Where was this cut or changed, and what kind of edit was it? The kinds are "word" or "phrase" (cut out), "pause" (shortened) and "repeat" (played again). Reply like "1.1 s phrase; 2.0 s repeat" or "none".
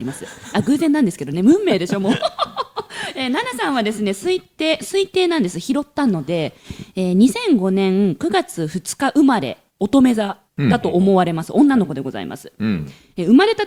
9.7 s pause; 10.5 s pause